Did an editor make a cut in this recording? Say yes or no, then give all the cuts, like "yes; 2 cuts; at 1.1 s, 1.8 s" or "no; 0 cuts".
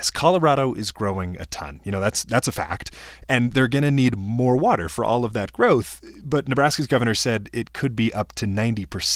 no; 0 cuts